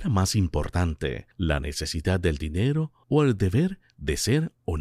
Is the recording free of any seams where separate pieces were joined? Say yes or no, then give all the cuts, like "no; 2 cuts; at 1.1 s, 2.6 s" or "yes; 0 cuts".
no; 1 cut; at 1.3 s